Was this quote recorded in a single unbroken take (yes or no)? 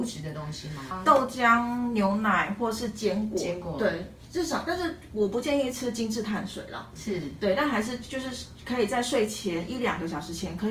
yes